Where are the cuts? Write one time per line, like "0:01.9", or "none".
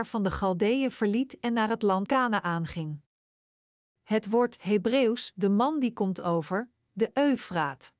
0:02.1
0:05.3
0:06.8